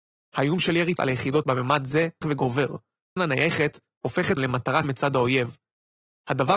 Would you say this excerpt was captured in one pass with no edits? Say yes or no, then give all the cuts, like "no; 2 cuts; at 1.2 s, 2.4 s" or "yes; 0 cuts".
no; 6 cuts; at 1.0 s, 1.4 s, 2.2 s, 3.2 s, 4.4 s, 4.8 s